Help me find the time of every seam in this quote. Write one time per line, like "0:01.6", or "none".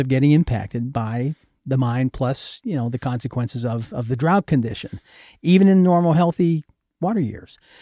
none

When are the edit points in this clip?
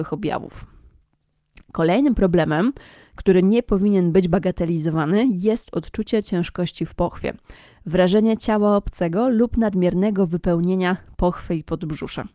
none

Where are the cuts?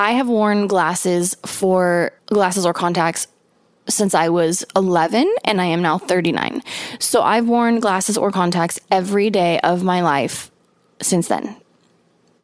0:02.2

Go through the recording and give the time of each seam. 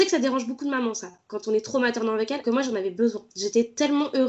0:02.4

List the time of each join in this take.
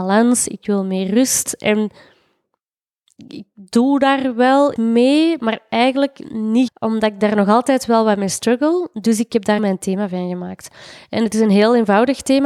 0:04.8
0:06.7
0:09.6

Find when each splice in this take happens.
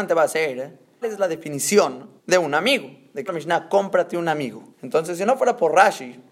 0:01.0
0:02.2
0:03.3
0:04.7

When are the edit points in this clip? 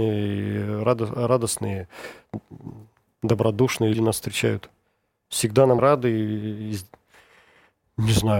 0:03.9
0:05.8

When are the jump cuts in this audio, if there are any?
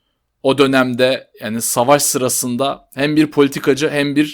none

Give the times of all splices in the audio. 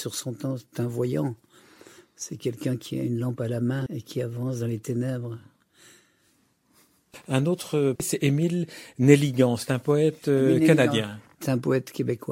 0:03.9
0:08.0

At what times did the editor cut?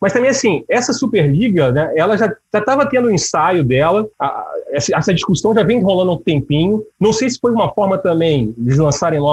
0:04.1
0:06.9

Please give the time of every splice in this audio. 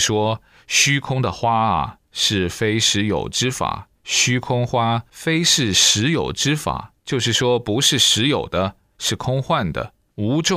0:02.0
0:03.9
0:07.0

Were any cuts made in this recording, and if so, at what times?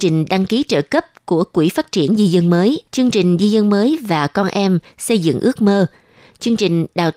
0:02.9

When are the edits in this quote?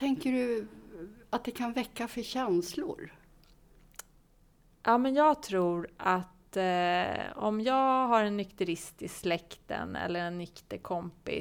none

